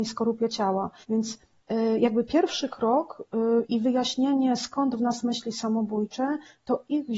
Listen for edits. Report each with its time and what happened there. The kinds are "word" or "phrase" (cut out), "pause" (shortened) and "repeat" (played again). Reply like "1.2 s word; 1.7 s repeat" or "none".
1.0 s pause